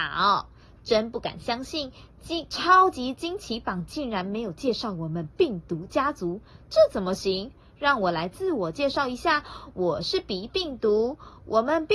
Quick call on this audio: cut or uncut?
uncut